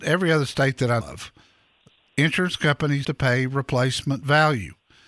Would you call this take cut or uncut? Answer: cut